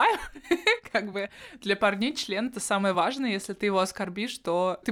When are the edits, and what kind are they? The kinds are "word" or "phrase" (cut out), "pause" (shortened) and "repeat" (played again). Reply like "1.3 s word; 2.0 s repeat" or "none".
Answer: none